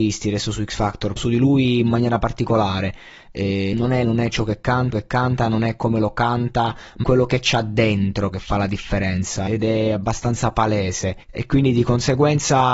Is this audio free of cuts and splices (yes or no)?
no